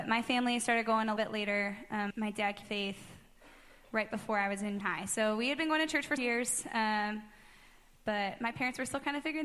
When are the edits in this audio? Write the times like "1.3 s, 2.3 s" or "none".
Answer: 1.2 s, 2.1 s, 2.6 s, 4.8 s, 6.2 s